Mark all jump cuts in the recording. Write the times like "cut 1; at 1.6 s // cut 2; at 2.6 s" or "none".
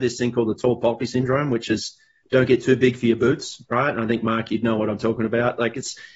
none